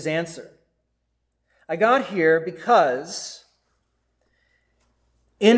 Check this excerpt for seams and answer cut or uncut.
uncut